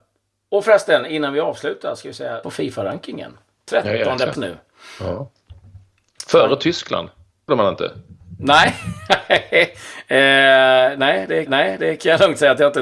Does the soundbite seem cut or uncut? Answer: cut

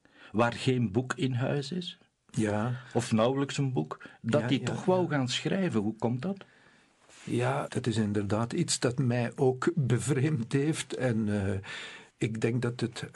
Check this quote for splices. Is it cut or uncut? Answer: uncut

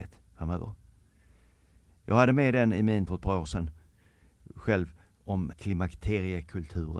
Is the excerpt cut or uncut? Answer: cut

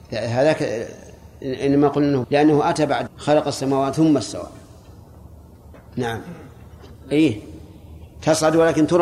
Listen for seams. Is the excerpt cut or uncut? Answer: cut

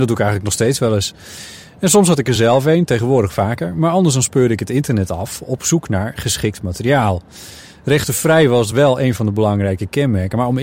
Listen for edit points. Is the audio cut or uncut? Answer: uncut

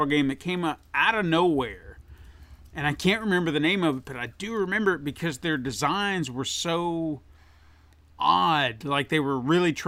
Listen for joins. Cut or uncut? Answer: uncut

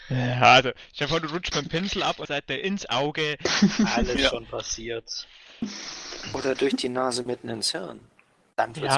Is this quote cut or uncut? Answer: uncut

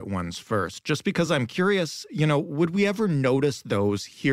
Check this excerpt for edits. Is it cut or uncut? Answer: uncut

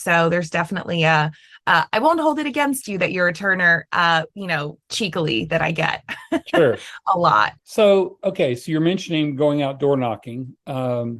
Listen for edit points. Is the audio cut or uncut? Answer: cut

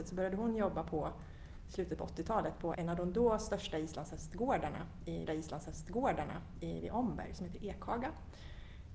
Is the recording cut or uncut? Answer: cut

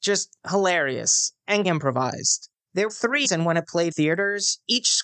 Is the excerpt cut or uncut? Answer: cut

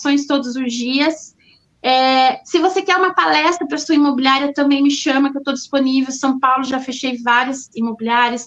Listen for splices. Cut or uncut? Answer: uncut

